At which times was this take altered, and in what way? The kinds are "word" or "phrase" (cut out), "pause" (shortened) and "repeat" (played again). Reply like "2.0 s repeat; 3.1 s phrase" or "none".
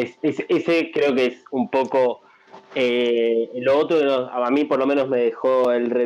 none